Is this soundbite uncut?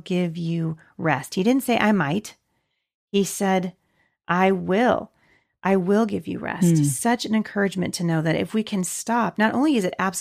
yes; 0 cuts

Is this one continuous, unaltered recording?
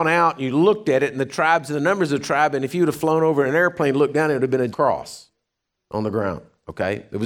no; 1 cut; at 4.7 s

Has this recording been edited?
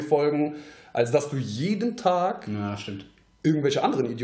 no; 0 cuts

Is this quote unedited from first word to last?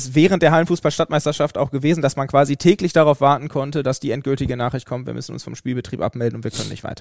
yes; 0 cuts

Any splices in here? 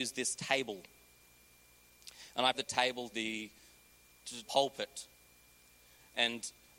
yes; 3 cuts; at 2.5 s, 3.1 s, 4.4 s

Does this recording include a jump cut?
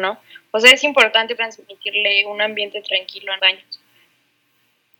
yes; 2 cuts; at 1.4 s, 3.4 s

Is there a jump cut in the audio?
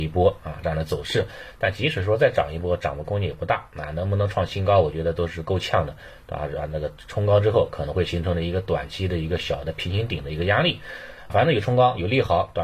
yes; 1 cut; at 11.3 s

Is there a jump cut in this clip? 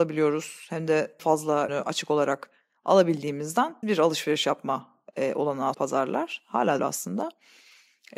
yes; 5 cuts; at 1.2 s, 1.7 s, 3.8 s, 5.7 s, 6.8 s

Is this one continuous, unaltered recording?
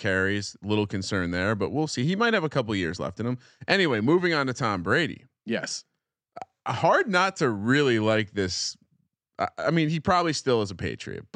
yes; 0 cuts

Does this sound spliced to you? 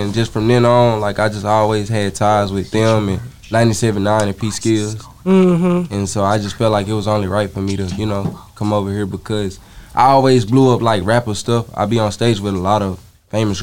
no; 0 cuts

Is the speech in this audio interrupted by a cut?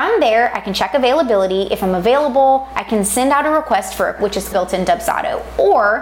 yes; 2 cuts; at 4.2 s, 4.5 s

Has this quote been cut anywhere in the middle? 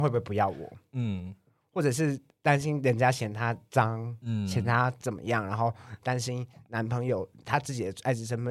no; 0 cuts

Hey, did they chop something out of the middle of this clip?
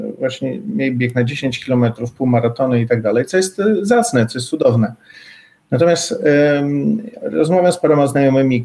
no; 0 cuts

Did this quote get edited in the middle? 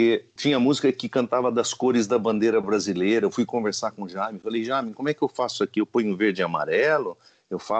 no; 0 cuts

